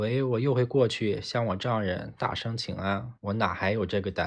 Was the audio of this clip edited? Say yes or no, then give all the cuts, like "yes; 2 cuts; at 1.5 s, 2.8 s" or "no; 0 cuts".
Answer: yes; 1 cut; at 3.2 s